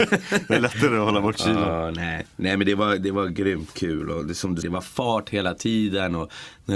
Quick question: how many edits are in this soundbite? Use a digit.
1